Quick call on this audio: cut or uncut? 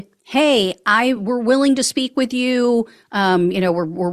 uncut